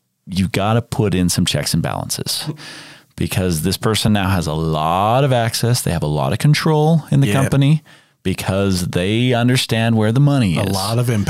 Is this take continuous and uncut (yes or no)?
yes